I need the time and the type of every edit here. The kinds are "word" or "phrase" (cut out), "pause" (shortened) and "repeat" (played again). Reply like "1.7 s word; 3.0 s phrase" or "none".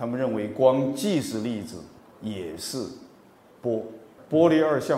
none